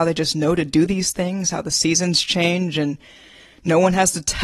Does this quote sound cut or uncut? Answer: uncut